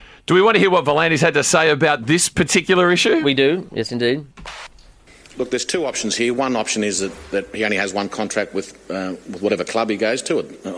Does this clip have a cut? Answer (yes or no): no